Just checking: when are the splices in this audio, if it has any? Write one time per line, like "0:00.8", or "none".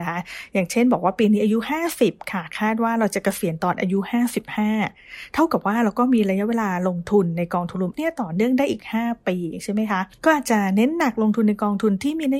0:07.9
0:10.1